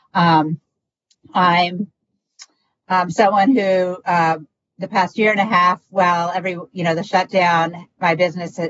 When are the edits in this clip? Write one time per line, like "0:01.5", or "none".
none